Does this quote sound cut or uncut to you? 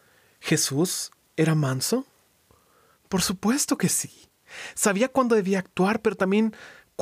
uncut